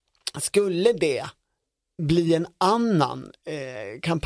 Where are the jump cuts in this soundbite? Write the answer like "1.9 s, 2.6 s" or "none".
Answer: none